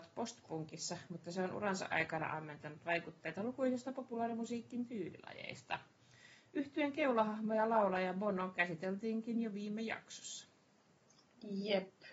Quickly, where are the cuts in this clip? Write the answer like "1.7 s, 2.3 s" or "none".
none